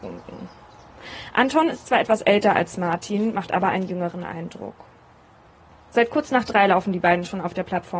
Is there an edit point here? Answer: no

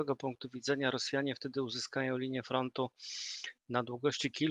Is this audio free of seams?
yes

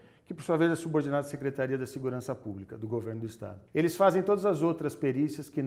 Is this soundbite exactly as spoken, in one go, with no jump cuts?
no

